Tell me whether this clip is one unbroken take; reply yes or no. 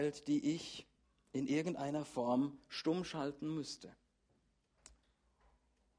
yes